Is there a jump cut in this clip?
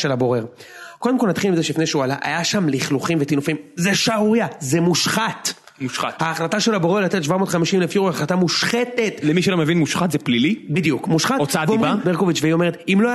yes; 1 cut; at 12.0 s

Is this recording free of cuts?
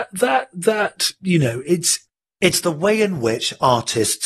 yes; 0 cuts

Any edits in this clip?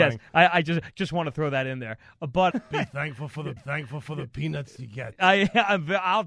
yes; 2 cuts; at 2.5 s, 3.6 s

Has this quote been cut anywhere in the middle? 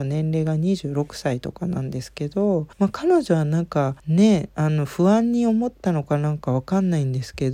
yes; 2 cuts; at 2.7 s, 4.0 s

